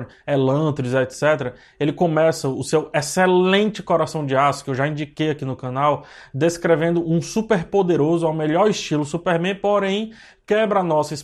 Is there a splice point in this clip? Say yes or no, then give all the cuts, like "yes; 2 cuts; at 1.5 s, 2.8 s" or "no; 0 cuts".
no; 0 cuts